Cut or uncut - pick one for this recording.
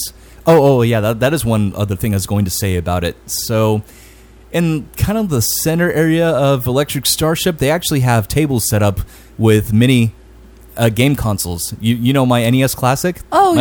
uncut